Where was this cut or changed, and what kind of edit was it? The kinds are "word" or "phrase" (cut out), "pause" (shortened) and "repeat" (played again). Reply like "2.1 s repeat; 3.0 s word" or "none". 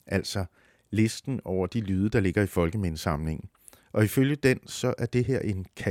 none